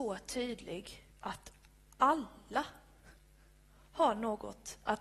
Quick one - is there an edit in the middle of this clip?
yes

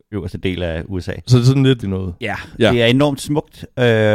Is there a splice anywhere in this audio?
yes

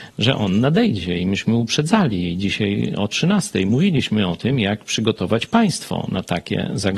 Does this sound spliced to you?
no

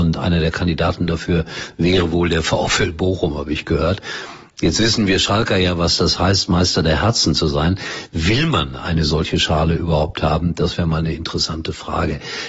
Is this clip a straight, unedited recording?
yes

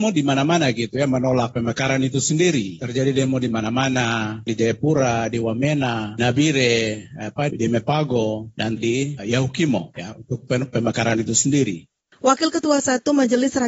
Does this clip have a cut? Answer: yes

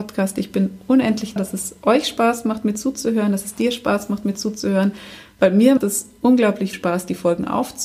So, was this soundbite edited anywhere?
yes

